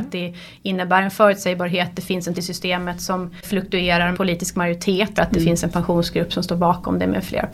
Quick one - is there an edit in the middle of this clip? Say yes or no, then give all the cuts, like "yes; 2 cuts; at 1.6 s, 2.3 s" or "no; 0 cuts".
yes; 4 cuts; at 2.3 s, 3.4 s, 4.1 s, 5.2 s